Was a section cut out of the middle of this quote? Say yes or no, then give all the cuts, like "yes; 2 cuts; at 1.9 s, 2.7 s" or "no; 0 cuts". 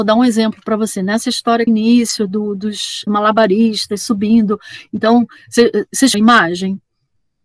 yes; 3 cuts; at 1.7 s, 3.1 s, 6.1 s